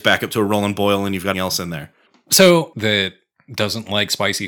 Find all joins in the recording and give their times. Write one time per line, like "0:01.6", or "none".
0:01.3
0:02.7